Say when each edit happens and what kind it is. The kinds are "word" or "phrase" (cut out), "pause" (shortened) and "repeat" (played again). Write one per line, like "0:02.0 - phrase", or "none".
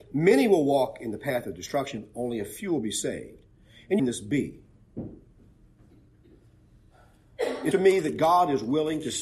0:04.0 - phrase
0:07.7 - word